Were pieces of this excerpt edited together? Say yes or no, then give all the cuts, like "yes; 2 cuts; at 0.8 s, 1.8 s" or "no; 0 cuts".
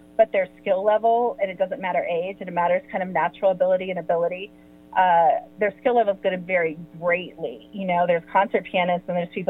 no; 0 cuts